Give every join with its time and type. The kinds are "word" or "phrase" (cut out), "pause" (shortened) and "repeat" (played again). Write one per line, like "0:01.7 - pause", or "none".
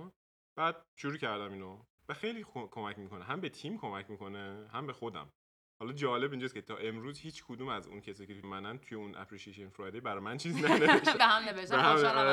0:08.4 - word
0:11.2 - word